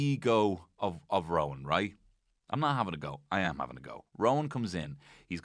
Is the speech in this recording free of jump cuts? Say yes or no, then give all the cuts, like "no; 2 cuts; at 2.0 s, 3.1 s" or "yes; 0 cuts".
yes; 0 cuts